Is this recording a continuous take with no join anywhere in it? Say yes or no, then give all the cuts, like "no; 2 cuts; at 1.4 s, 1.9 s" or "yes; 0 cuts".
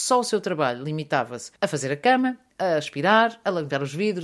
no; 1 cut; at 1.6 s